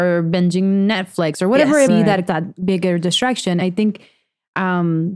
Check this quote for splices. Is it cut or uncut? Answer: cut